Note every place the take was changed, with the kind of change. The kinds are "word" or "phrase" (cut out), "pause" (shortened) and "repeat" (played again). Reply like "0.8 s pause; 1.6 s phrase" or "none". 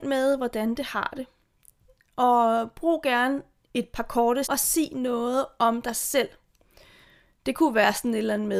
4.4 s word